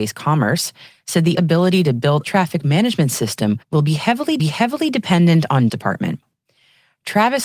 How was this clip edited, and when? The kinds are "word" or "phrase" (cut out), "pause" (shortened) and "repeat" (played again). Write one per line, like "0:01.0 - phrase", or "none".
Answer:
0:01.3 - word
0:02.2 - phrase
0:03.6 - pause
0:04.4 - repeat
0:05.7 - phrase